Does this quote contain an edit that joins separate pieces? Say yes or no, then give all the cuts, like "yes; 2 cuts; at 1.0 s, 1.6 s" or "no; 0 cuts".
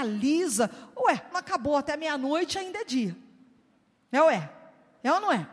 yes; 1 cut; at 1.3 s